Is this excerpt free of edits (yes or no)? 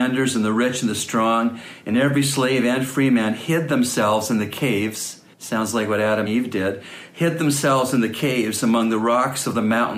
no